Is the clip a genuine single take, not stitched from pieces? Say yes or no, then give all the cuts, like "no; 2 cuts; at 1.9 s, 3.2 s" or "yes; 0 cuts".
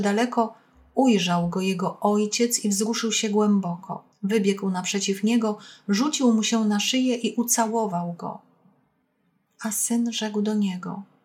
no; 1 cut; at 4.1 s